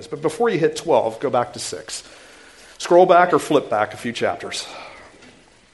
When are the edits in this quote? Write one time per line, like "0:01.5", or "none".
none